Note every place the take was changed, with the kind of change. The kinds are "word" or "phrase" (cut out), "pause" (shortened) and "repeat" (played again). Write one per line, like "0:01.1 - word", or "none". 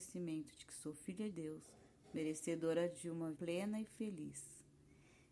0:01.3 - word
0:03.3 - word